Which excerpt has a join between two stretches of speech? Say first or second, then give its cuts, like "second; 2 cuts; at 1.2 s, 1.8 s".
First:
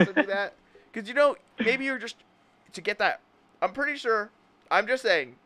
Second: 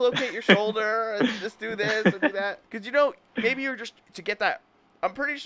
second; 2 cuts; at 2.7 s, 4.0 s